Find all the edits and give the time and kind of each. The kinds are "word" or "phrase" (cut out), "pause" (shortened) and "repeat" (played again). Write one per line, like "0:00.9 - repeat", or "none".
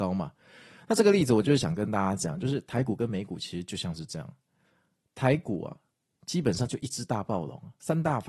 none